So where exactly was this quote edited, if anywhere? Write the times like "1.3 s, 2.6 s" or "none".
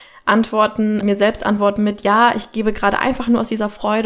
1.0 s

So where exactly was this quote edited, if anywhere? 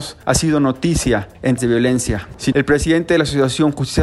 1.6 s, 2.5 s

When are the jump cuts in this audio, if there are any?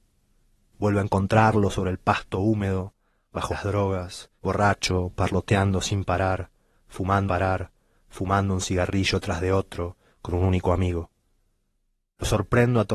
3.5 s, 4.4 s, 7.3 s

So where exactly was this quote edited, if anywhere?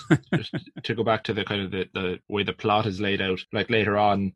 none

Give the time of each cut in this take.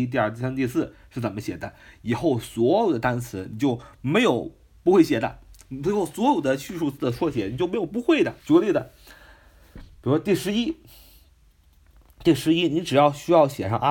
8.4 s

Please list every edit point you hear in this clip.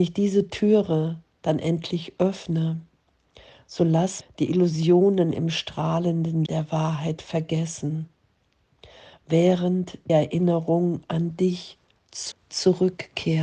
4.2 s, 6.5 s, 10.1 s, 12.3 s

